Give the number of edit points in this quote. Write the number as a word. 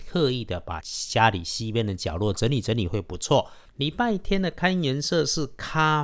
one